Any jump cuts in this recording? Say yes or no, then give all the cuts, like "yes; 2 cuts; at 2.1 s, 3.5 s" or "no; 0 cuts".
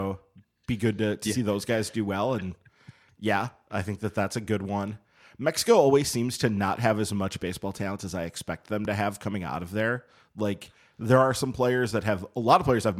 no; 0 cuts